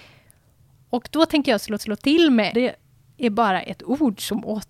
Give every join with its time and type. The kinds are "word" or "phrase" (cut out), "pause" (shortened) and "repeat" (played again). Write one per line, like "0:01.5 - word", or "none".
0:01.8 - repeat
0:02.5 - phrase